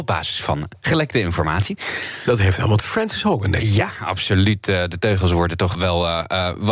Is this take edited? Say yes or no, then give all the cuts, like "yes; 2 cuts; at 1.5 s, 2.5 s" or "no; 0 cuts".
yes; 2 cuts; at 2.8 s, 5.7 s